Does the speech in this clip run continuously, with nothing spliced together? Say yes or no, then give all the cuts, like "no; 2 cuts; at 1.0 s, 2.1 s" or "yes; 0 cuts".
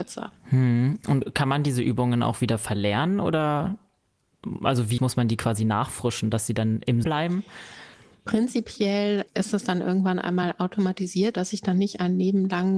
no; 4 cuts; at 5.0 s, 7.0 s, 9.3 s, 11.3 s